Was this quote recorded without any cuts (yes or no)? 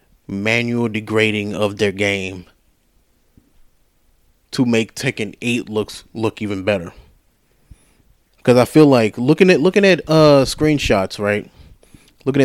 yes